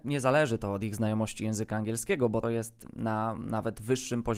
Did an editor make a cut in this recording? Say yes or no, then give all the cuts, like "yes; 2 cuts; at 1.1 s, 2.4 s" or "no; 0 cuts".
yes; 1 cut; at 2.4 s